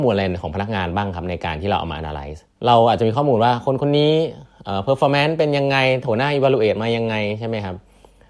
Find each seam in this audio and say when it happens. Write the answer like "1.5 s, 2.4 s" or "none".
2.5 s